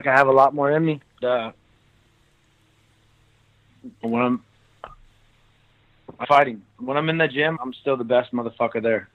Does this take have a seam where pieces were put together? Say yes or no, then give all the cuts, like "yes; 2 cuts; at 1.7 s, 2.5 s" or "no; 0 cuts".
yes; 4 cuts; at 1.2 s, 4.0 s, 6.2 s, 7.6 s